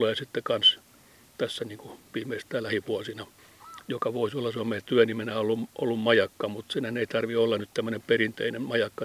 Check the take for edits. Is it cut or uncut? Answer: cut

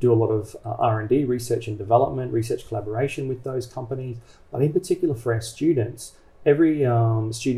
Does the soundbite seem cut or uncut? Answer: uncut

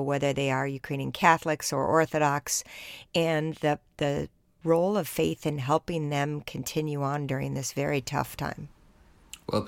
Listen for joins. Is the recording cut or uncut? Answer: uncut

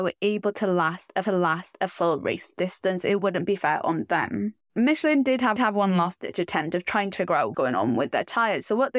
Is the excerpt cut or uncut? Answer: cut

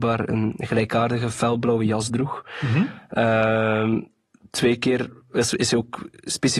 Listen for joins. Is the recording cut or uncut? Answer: uncut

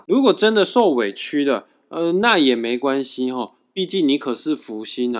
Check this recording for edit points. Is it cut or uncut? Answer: uncut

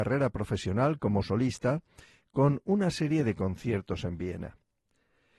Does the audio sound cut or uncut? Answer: uncut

